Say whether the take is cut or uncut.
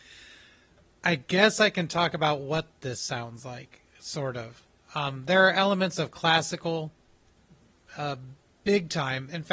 uncut